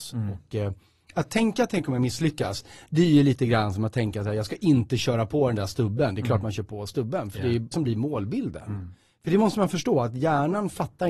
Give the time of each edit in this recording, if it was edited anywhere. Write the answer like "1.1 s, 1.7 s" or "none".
7.7 s